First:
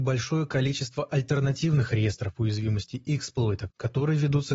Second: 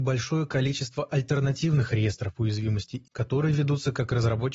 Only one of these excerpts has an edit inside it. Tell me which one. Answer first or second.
second